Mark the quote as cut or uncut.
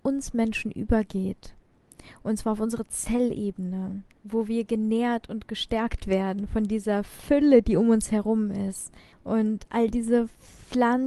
cut